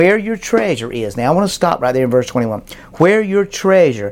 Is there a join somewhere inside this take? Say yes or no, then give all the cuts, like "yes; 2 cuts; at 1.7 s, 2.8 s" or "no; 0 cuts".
no; 0 cuts